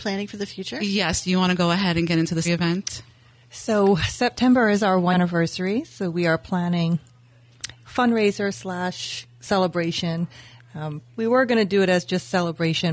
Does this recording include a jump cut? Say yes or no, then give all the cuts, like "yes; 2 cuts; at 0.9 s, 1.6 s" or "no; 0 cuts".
yes; 4 cuts; at 2.4 s, 5.1 s, 7.8 s, 11.1 s